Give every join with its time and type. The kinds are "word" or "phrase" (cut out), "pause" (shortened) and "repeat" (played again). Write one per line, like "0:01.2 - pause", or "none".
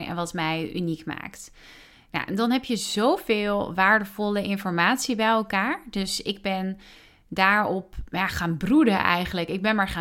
none